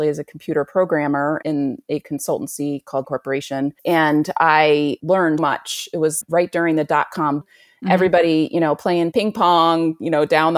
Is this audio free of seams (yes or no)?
no